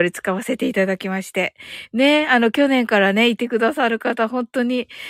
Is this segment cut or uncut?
uncut